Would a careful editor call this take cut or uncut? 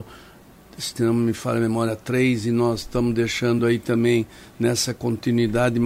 uncut